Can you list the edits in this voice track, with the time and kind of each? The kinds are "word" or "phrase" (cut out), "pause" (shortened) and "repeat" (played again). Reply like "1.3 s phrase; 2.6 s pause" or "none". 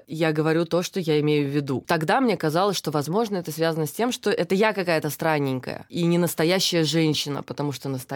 none